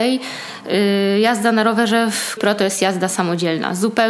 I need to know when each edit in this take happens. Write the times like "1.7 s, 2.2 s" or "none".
2.4 s